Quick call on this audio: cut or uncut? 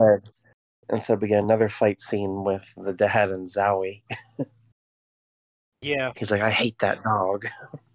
uncut